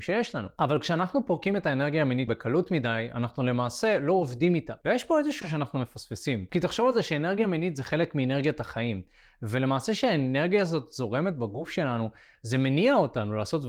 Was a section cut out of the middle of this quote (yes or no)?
yes